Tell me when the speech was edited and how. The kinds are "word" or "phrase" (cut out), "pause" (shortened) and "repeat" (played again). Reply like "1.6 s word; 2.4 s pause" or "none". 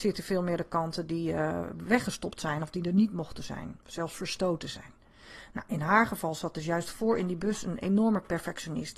none